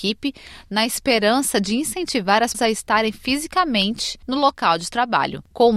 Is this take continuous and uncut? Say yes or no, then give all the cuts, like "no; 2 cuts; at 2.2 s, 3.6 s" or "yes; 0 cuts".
no; 1 cut; at 2.5 s